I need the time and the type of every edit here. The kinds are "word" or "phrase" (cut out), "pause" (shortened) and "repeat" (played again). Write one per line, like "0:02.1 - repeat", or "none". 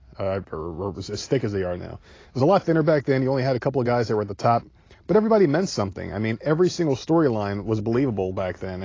none